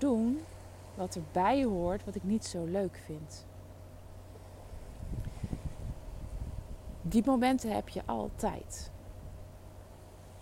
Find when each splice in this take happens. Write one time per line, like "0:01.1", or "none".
none